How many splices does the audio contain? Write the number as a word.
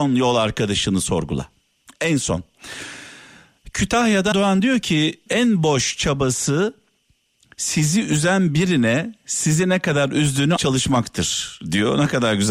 three